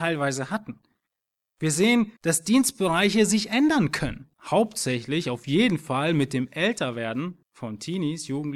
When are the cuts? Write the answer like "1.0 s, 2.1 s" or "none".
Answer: 2.2 s, 4.3 s, 7.4 s